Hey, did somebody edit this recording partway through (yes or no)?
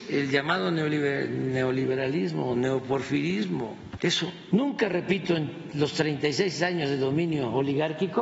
no